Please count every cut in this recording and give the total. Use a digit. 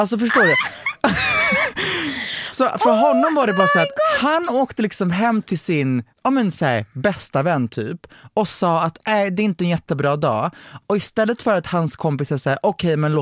1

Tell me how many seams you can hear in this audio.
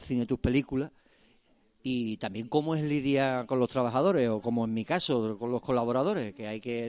0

